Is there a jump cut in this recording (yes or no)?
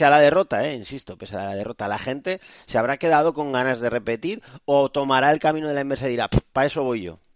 no